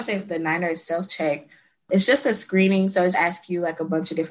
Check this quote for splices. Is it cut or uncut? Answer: cut